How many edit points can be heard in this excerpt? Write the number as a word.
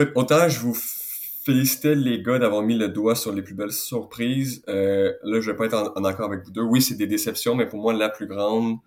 zero